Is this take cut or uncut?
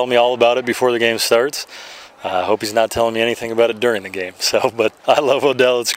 cut